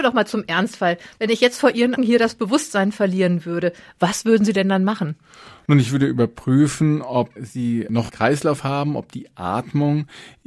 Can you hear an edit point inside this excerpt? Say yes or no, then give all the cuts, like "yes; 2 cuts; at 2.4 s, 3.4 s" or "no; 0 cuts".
yes; 3 cuts; at 2.0 s, 7.4 s, 8.1 s